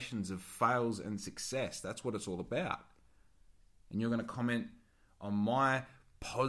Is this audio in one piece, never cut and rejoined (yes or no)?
yes